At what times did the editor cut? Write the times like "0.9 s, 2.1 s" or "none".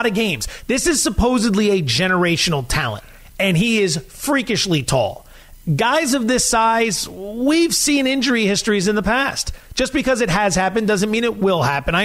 none